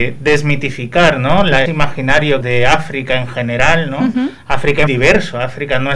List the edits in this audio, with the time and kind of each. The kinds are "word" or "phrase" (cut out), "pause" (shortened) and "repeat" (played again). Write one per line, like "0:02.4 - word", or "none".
0:01.7 - word
0:02.4 - phrase
0:04.9 - word